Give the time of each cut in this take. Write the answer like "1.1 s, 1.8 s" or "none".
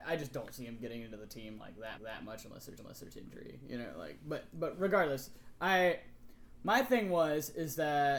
2.0 s, 2.8 s